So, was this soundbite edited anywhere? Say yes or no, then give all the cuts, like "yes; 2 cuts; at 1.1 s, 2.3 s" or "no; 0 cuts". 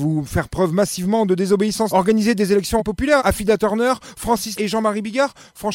yes; 4 cuts; at 1.9 s, 2.8 s, 3.2 s, 4.6 s